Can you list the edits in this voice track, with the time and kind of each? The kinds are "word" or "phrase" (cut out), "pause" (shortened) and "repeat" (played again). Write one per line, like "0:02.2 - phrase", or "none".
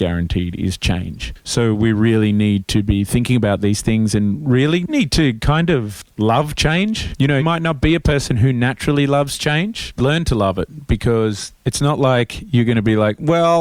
0:04.9 - word
0:07.4 - word
0:10.0 - phrase
0:11.6 - pause